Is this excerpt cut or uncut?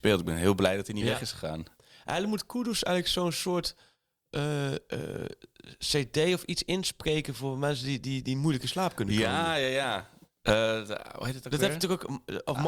uncut